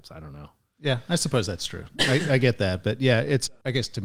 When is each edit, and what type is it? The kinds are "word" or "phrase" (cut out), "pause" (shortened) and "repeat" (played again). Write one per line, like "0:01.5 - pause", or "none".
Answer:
none